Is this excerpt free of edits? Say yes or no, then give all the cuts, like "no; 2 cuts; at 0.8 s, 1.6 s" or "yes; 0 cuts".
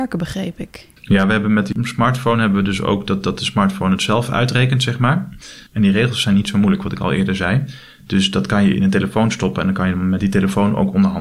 no; 1 cut; at 1.0 s